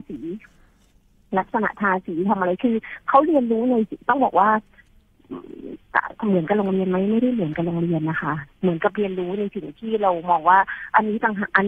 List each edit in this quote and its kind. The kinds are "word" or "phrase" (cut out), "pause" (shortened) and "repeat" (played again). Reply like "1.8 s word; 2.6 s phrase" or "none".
none